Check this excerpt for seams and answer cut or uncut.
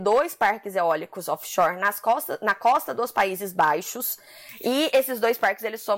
uncut